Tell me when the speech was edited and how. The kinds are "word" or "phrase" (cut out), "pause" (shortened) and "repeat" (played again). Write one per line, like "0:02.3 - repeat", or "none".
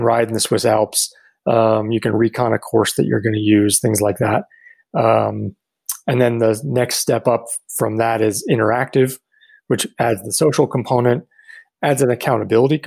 none